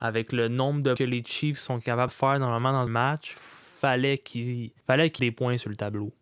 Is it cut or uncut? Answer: cut